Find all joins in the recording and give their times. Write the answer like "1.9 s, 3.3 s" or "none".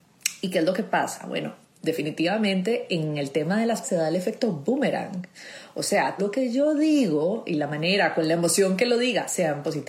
3.8 s, 6.2 s